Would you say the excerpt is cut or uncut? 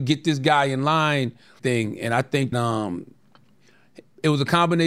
cut